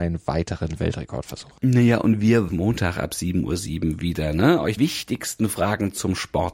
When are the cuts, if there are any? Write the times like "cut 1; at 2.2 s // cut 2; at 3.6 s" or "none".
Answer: cut 1; at 1.6 s // cut 2; at 2.5 s // cut 3; at 4.8 s